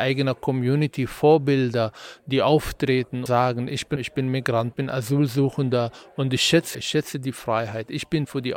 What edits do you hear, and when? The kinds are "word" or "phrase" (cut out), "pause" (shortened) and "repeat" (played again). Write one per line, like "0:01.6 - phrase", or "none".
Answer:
0:03.3 - word
0:04.0 - word
0:04.7 - word
0:06.7 - word